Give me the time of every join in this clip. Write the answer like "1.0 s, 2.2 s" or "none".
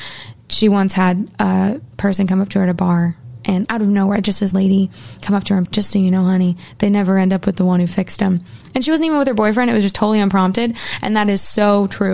3.6 s, 4.5 s, 5.6 s